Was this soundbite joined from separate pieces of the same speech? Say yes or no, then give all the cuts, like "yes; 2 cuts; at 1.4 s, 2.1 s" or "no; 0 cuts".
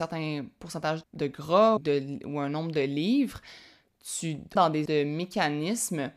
yes; 4 cuts; at 1.0 s, 1.8 s, 4.6 s, 4.9 s